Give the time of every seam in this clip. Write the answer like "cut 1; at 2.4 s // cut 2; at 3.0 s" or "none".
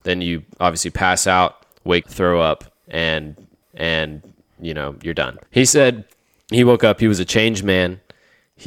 cut 1; at 2.0 s // cut 2; at 3.6 s // cut 3; at 5.5 s // cut 4; at 6.5 s